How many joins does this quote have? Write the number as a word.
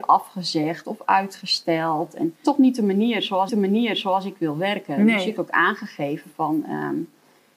three